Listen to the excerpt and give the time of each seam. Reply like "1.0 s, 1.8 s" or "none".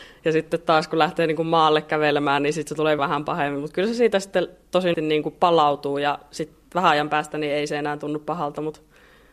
3.0 s, 4.9 s